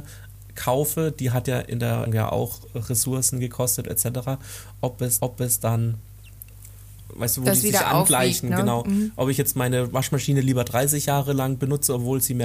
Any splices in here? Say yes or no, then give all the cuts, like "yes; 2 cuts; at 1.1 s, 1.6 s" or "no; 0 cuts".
yes; 2 cuts; at 2.1 s, 5.2 s